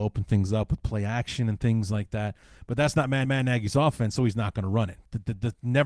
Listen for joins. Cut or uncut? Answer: cut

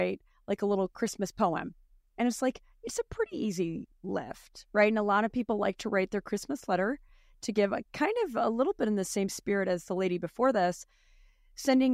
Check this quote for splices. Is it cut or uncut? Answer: uncut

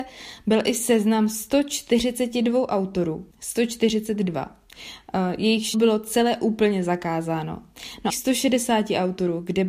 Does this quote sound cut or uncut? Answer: cut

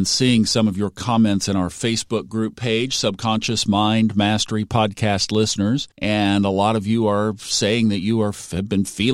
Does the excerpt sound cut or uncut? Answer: cut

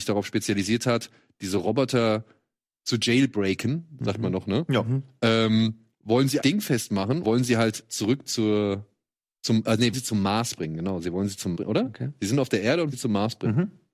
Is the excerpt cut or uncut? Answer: cut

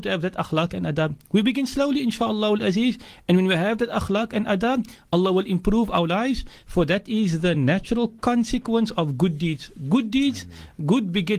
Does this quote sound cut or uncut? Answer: uncut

